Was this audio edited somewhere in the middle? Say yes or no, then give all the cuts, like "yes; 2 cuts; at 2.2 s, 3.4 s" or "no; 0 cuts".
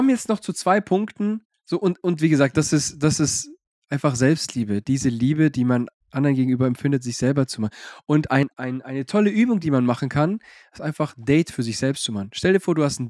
no; 0 cuts